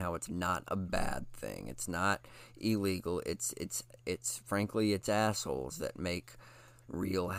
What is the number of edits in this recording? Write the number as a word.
zero